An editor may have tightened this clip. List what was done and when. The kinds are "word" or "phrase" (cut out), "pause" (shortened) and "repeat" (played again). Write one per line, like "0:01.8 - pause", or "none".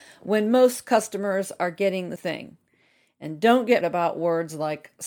0:02.2 - word
0:03.8 - phrase